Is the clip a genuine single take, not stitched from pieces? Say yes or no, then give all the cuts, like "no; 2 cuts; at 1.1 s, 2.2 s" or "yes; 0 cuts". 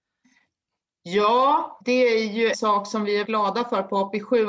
no; 3 cuts; at 1.8 s, 2.5 s, 3.2 s